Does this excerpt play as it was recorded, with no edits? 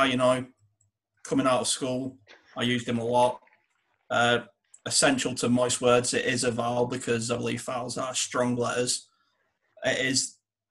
yes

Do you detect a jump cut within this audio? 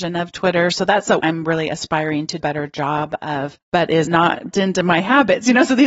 yes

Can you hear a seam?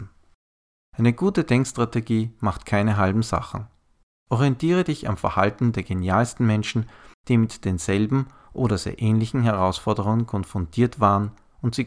no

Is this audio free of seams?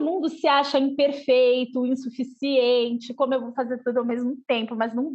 yes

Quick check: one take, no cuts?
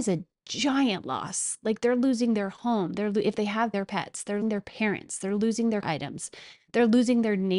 no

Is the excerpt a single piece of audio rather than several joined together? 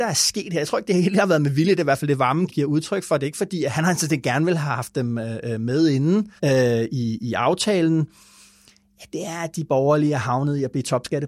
no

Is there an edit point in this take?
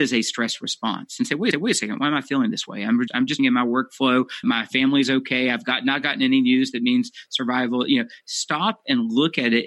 yes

